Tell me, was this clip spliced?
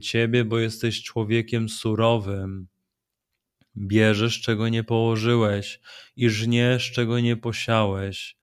no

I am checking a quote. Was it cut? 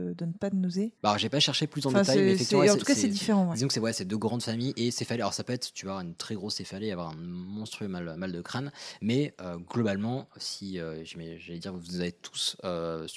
yes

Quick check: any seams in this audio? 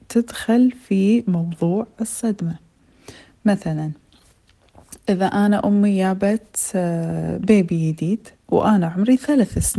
no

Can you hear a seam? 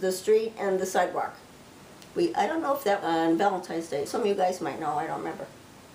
yes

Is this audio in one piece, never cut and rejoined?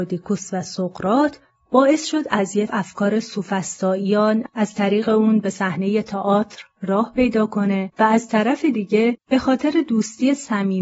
no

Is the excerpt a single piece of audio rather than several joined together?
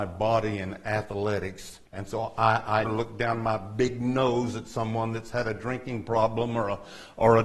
no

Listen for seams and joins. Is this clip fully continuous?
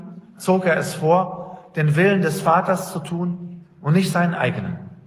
yes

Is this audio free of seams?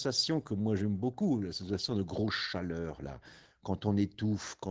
yes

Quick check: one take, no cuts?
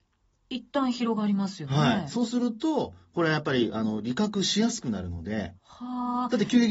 no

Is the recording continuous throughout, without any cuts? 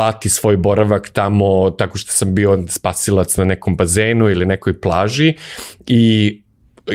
yes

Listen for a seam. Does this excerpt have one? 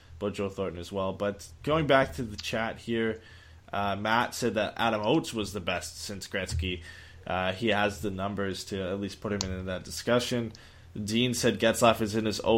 no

